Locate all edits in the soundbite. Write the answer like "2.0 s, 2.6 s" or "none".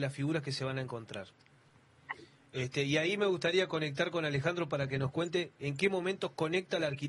none